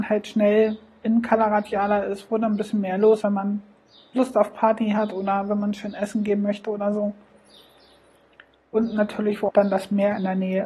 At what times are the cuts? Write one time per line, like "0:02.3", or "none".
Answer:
0:03.2
0:09.5

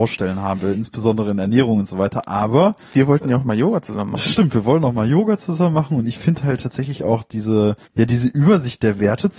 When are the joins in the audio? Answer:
0:02.8
0:07.8

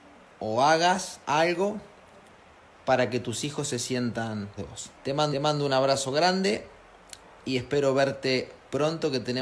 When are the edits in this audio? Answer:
0:01.2
0:04.6
0:04.9
0:05.3
0:07.2

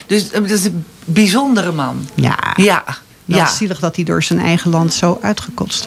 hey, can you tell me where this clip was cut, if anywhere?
0:03.1

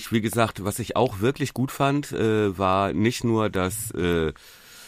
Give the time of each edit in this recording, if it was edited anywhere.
none

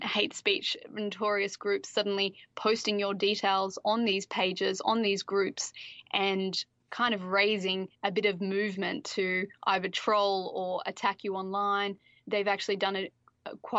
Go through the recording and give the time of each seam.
0:07.9

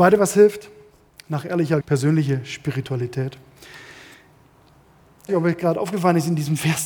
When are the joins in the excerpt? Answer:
0:01.8
0:05.3

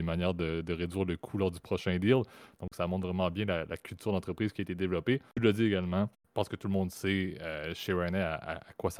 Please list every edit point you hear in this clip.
0:05.3
0:06.1

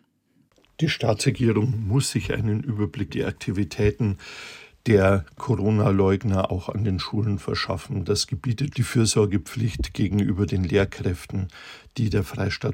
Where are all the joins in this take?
0:03.1
0:08.7

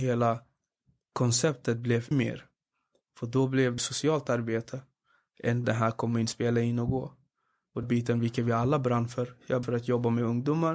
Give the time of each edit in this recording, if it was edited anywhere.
0:02.1
0:03.8
0:05.6
0:07.8
0:09.6

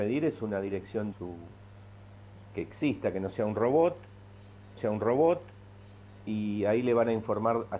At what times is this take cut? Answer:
0:01.1
0:02.5
0:04.8

